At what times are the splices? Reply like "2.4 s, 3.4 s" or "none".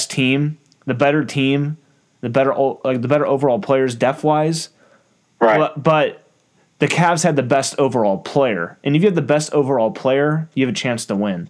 none